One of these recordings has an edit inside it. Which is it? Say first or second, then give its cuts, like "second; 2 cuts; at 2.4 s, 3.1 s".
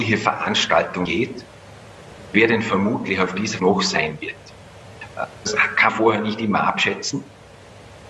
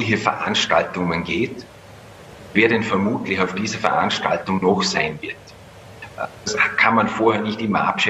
first; 3 cuts; at 1.1 s, 3.6 s, 5.9 s